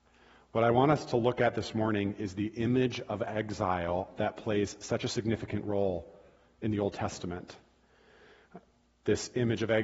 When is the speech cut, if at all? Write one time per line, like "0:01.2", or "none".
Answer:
none